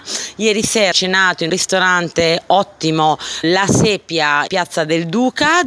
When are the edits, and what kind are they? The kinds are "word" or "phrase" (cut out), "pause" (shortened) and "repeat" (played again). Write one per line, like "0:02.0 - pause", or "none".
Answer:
0:00.9 - word
0:01.5 - word
0:03.4 - word
0:04.5 - word